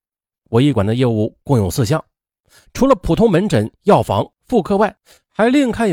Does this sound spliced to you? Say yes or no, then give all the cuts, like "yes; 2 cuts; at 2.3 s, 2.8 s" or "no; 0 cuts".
no; 0 cuts